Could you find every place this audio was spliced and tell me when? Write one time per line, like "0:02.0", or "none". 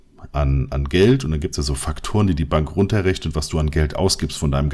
none

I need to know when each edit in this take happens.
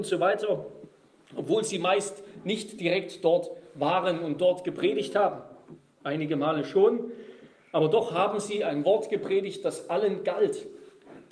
none

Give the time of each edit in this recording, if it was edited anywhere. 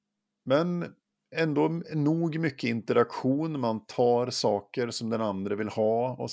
0:01.0

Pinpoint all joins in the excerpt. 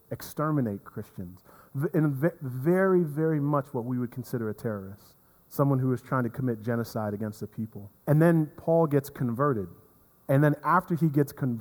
0:05.4
0:08.0

